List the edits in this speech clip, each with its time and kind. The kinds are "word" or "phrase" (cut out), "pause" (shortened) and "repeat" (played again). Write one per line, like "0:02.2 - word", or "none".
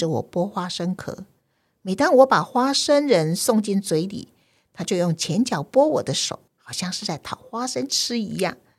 0:06.5 - pause